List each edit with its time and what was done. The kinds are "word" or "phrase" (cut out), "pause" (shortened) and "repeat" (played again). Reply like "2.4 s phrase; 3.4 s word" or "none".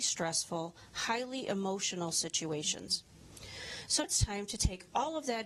4.0 s word